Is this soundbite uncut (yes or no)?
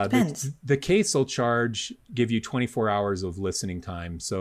yes